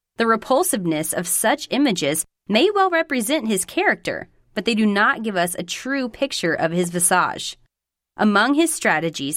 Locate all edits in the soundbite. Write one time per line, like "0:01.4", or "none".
none